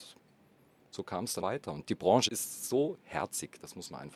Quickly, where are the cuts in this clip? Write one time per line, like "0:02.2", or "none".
0:01.4
0:02.3